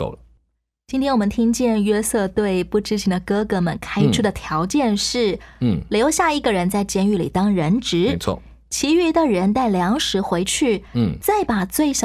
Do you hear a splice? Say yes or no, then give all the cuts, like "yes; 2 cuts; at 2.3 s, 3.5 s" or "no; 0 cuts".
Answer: no; 0 cuts